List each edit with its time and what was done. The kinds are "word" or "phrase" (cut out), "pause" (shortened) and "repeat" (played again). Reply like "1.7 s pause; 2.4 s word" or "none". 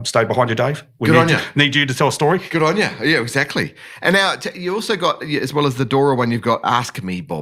none

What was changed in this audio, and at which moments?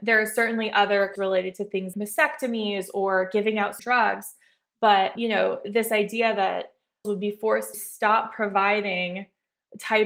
1.2 s word; 1.9 s word; 3.8 s word; 5.2 s word; 7.0 s word; 7.7 s word

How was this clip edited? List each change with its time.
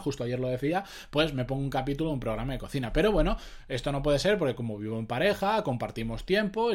none

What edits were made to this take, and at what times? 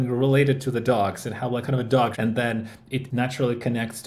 1.6 s word; 2.1 s word; 3.1 s word

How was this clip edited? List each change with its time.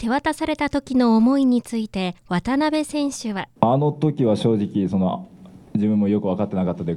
2.2 s pause; 3.6 s pause

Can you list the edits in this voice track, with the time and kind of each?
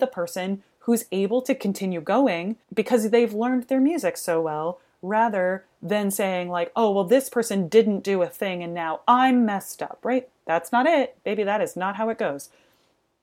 2.6 s pause

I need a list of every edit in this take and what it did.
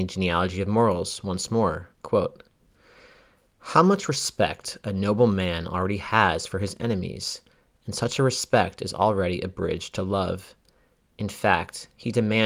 1.9 s pause

